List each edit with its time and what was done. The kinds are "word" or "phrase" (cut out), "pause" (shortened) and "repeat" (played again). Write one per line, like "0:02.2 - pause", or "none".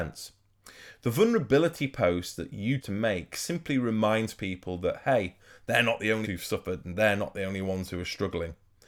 0:02.8 - word
0:06.2 - word